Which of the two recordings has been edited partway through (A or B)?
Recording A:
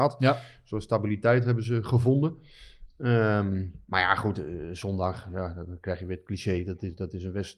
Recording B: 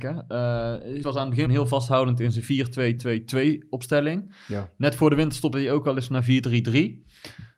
B